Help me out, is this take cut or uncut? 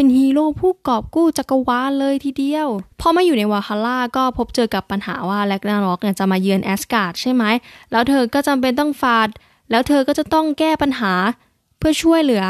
cut